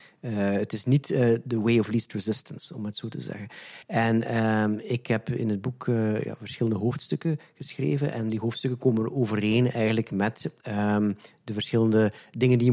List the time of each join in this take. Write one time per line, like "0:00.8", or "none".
0:03.8

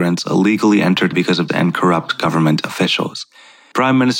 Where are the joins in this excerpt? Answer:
0:01.1
0:01.5

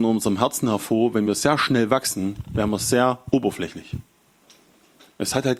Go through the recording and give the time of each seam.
none

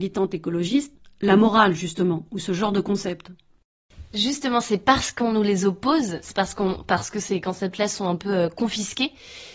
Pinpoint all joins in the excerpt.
none

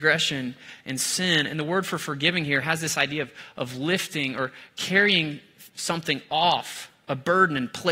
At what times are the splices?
none

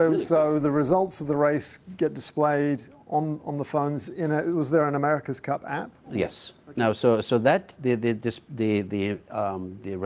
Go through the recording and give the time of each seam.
none

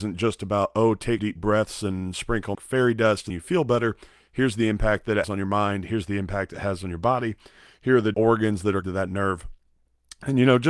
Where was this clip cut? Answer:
0:01.2
0:02.5
0:03.3
0:05.2
0:08.1
0:08.8

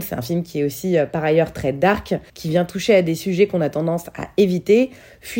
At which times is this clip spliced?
0:02.3

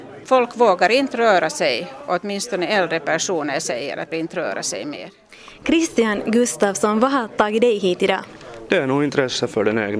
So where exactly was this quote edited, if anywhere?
0:04.1

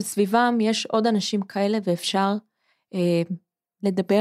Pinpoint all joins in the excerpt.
none

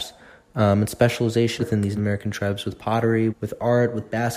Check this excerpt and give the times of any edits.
0:01.6
0:02.0
0:03.3

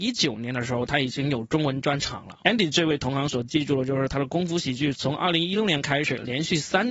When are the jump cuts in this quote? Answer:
0:02.4

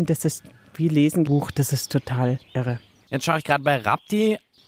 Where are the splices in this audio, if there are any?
0:01.3
0:02.4

